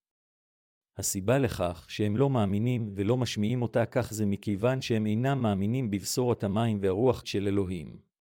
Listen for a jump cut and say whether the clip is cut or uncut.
cut